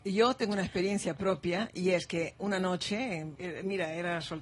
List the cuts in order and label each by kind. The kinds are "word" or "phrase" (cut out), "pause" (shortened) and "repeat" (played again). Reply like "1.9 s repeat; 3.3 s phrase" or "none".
3.4 s word